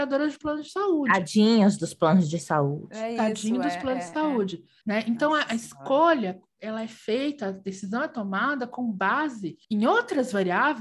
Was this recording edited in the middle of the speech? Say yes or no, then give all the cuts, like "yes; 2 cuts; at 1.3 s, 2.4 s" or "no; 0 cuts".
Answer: yes; 2 cuts; at 4.8 s, 9.6 s